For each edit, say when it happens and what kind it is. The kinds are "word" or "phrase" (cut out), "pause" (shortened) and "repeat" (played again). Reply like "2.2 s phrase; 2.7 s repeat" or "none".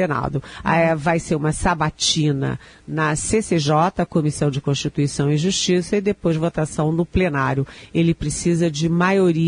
none